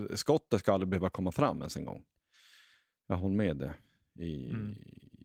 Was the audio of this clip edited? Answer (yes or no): no